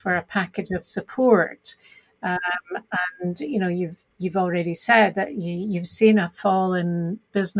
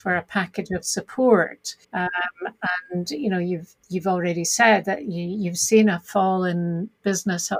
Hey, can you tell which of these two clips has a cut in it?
second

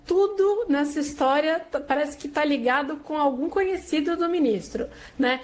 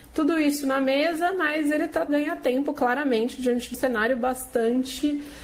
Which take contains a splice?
second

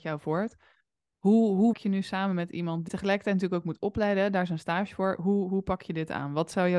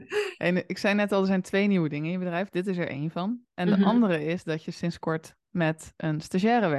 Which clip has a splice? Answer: first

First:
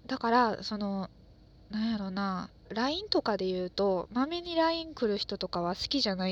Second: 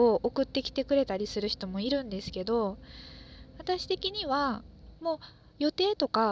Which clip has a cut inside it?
second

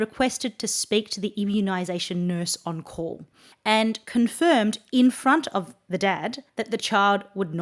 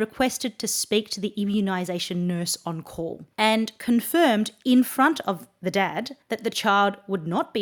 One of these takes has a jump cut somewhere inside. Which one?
second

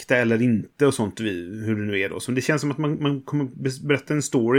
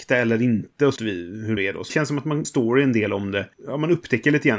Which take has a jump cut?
second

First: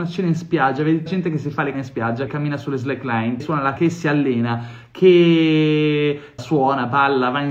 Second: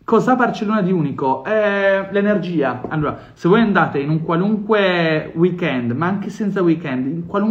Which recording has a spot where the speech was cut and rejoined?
first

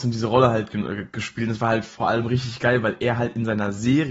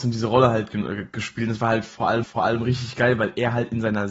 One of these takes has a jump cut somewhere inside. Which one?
second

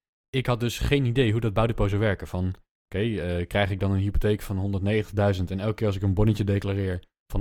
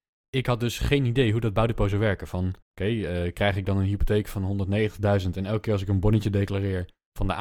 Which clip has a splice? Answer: second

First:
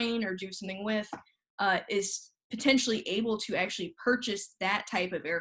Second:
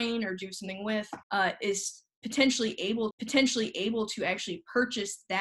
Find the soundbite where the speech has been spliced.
second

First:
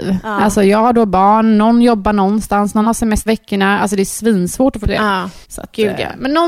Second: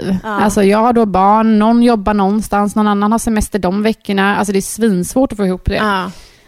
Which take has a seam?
first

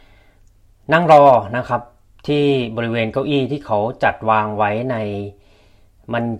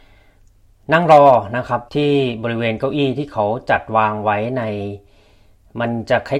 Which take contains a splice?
second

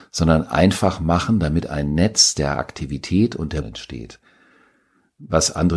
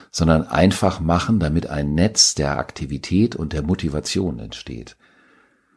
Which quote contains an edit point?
first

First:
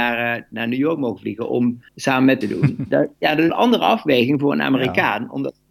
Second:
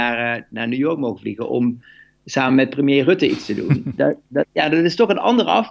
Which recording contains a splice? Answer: first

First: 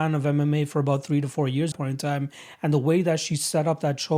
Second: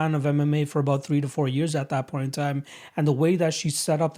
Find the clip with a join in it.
first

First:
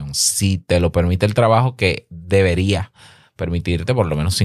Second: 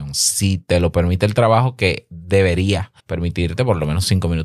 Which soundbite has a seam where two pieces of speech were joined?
second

